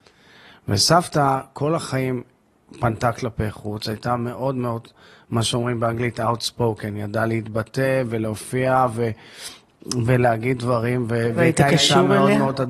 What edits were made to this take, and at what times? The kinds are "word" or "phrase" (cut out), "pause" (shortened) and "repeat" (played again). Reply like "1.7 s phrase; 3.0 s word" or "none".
none